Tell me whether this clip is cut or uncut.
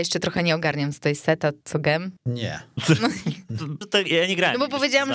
cut